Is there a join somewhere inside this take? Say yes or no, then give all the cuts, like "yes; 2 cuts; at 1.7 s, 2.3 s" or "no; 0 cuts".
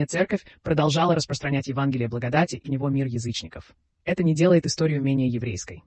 yes; 2 cuts; at 2.6 s, 3.9 s